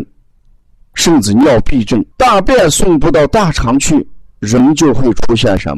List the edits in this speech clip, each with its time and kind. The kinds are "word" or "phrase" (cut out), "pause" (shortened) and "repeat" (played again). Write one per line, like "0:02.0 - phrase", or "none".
0:02.1 - pause